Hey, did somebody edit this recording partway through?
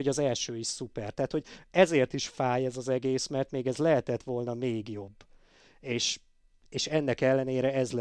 no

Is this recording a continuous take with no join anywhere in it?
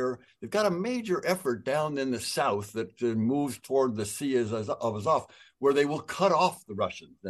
yes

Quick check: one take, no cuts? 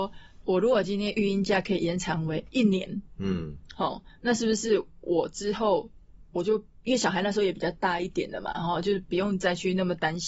yes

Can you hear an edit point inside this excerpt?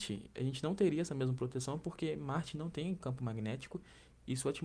no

